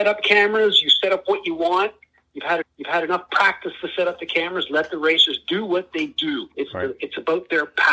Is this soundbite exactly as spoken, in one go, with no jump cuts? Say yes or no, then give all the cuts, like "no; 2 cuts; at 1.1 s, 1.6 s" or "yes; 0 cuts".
no; 2 cuts; at 2.6 s, 6.5 s